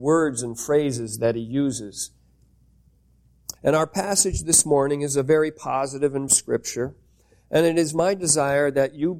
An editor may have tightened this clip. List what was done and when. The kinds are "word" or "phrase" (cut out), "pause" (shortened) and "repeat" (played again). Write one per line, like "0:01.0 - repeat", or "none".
0:03.6 - pause
0:06.3 - phrase